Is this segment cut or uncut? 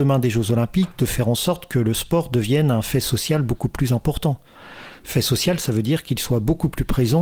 uncut